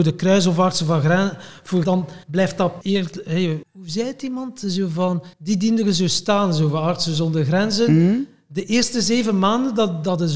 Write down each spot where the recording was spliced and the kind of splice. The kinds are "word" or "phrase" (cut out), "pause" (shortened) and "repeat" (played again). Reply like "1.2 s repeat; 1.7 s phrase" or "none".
1.8 s word; 2.2 s pause; 2.8 s phrase; 3.6 s word; 5.3 s pause

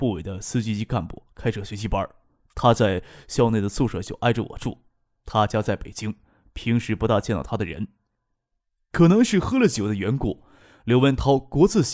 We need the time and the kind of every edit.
8.6 s pause

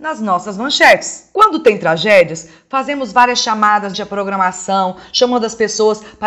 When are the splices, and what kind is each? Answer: 3.9 s word

